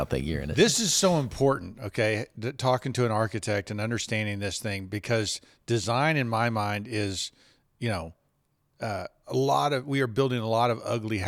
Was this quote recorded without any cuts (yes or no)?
yes